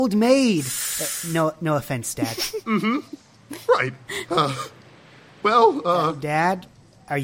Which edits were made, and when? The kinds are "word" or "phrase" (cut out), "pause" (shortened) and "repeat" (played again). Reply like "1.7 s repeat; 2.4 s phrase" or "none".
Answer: none